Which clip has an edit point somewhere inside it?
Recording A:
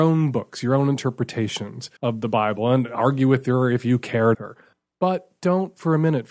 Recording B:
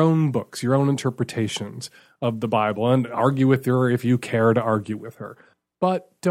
A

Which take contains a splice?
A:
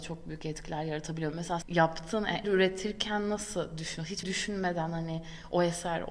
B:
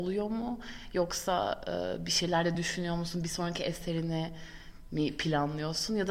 A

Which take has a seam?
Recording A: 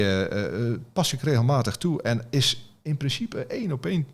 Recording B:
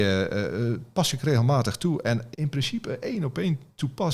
B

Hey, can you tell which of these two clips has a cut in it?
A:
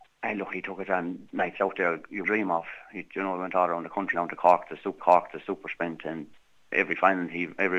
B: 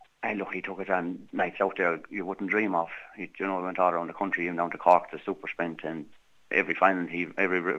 A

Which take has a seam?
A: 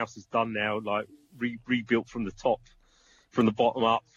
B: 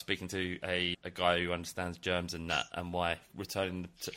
B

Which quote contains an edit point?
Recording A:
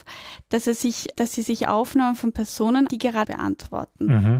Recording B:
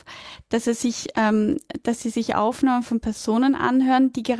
A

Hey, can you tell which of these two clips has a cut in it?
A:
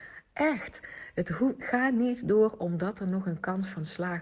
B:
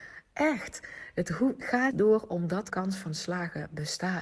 B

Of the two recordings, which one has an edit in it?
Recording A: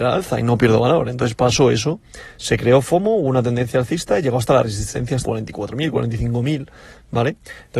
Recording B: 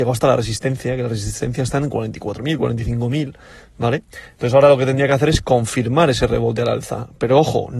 A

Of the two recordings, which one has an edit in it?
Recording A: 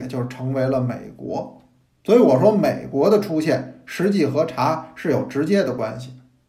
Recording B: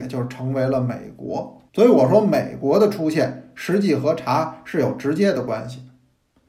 B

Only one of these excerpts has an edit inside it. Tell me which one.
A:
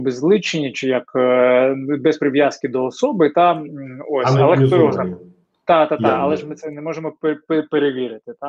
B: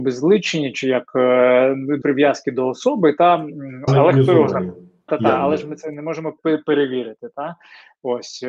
B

